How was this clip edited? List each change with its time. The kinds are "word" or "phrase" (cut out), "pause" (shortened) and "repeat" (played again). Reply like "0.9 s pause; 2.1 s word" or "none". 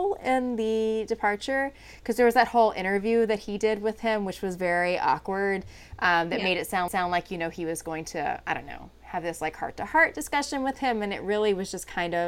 6.9 s repeat